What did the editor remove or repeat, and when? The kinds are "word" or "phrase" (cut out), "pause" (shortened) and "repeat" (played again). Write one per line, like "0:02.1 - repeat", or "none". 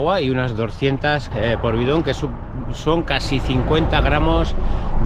0:01.3 - word